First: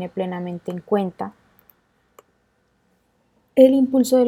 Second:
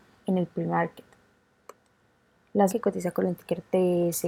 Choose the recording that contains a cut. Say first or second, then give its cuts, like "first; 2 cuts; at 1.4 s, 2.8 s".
second; 1 cut; at 2.7 s